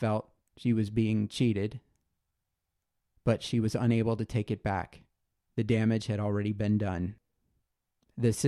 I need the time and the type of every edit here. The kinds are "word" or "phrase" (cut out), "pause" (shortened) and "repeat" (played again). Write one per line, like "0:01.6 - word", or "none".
none